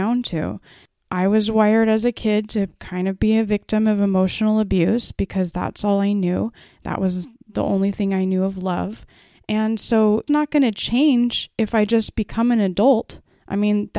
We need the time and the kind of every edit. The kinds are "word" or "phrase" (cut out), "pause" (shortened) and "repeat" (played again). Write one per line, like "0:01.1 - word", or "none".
0:10.3 - word